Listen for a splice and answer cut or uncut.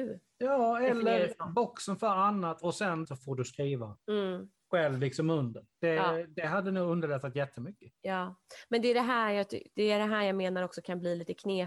cut